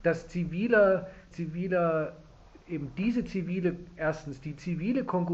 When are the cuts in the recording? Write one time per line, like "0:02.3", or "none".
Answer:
0:01.3
0:02.6